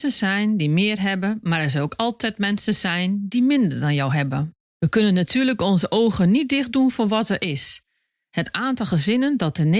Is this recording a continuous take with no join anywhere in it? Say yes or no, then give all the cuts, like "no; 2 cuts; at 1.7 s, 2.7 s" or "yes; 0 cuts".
yes; 0 cuts